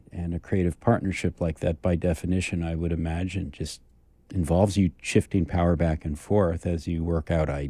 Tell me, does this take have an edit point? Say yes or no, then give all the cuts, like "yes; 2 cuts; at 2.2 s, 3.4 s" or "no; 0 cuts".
no; 0 cuts